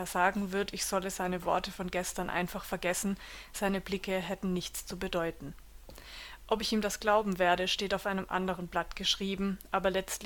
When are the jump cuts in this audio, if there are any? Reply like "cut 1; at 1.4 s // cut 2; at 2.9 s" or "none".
none